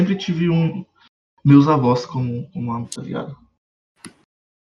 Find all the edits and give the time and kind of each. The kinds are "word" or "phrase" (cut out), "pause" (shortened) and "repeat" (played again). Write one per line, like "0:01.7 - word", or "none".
0:03.0 - phrase